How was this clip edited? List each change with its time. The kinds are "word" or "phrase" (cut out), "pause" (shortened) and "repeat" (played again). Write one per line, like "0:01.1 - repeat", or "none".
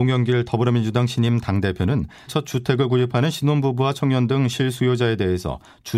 0:02.3 - word